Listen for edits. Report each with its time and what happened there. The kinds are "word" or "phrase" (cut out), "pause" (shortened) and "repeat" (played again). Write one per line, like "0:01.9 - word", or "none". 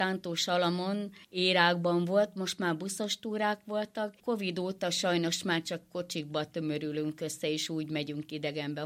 0:01.2 - pause